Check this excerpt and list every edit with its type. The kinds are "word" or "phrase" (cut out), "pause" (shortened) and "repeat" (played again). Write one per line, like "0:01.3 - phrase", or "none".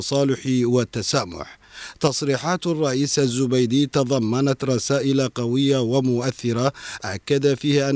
none